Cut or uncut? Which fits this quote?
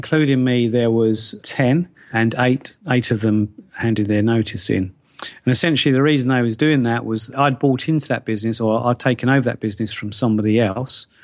cut